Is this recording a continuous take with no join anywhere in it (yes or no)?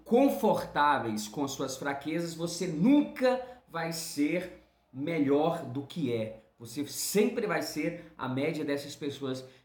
yes